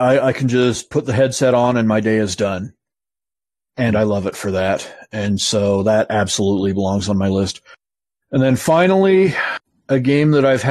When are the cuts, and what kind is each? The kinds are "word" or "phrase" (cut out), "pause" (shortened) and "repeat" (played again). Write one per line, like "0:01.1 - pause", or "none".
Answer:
none